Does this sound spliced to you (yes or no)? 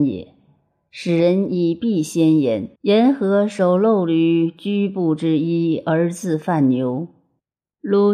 yes